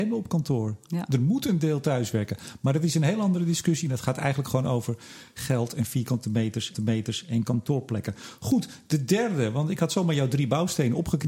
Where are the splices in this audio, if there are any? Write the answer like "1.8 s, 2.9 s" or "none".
6.7 s